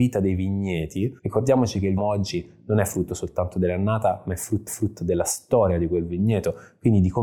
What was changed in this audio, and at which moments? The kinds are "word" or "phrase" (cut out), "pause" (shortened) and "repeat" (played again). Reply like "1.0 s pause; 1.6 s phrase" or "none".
1.2 s pause; 2.0 s phrase; 4.7 s repeat